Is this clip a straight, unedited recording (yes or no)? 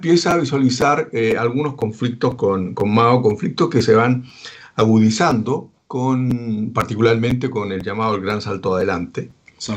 yes